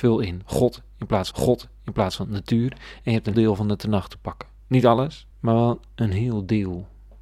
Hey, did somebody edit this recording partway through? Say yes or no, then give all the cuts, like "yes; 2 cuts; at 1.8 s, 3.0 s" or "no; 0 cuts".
yes; 4 cuts; at 1.3 s, 3.3 s, 4.6 s, 5.3 s